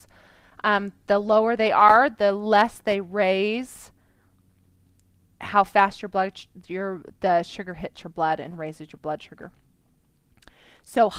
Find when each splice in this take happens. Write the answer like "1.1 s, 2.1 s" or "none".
none